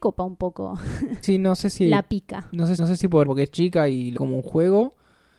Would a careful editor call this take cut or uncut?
cut